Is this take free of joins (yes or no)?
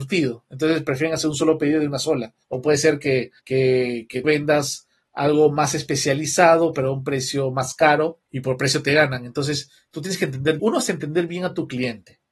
no